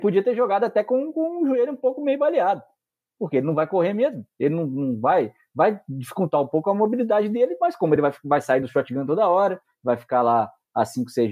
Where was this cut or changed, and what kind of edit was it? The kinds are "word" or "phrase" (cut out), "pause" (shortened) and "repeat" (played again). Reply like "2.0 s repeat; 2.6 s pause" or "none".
none